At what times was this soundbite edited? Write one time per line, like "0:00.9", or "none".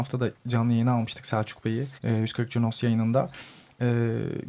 0:02.0